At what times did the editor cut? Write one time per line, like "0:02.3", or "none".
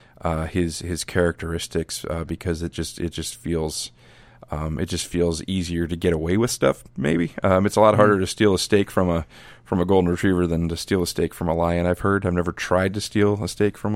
none